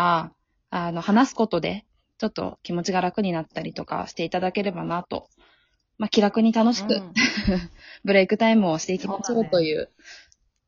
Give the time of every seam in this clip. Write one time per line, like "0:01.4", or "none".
none